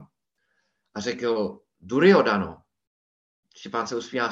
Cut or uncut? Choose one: uncut